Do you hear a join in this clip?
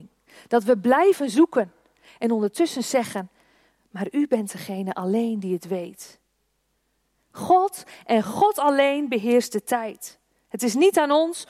no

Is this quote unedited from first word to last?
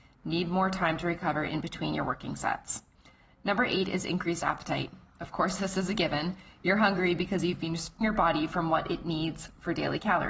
no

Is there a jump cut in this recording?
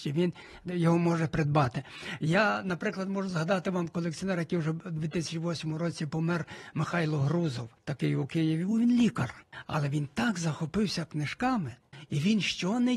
yes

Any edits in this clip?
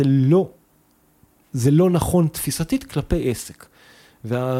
no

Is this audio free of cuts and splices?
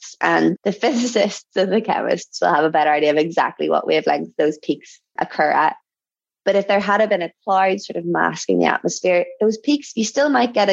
yes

